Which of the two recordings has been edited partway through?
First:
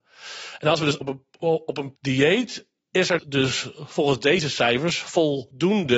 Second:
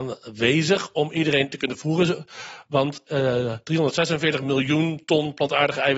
first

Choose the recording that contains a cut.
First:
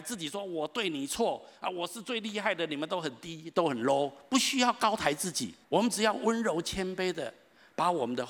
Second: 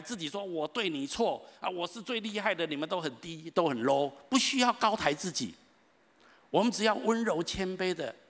first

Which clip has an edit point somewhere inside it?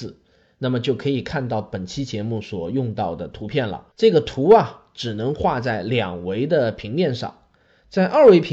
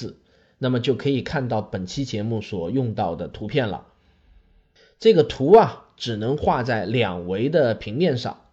first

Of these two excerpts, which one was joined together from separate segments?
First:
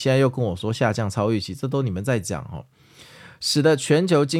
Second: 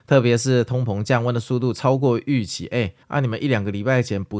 second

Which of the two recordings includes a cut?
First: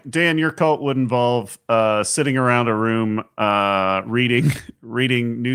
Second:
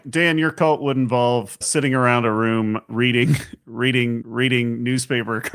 second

